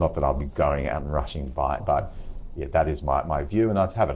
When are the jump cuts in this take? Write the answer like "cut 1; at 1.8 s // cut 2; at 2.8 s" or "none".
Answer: cut 1; at 1.8 s